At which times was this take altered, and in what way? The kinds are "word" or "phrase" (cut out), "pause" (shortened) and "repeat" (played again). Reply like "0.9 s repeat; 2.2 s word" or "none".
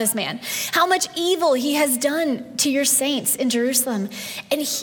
none